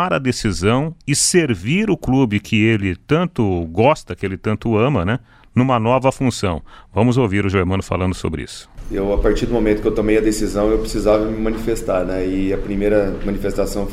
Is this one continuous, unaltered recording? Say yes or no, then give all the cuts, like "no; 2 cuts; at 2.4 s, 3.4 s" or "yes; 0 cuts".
yes; 0 cuts